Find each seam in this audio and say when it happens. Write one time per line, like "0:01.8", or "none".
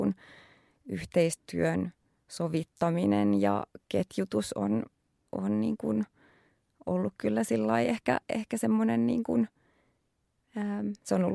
0:08.2